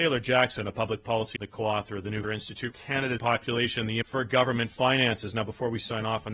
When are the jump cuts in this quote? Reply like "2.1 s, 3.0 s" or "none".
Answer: 1.4 s, 2.2 s, 2.7 s, 3.2 s, 4.0 s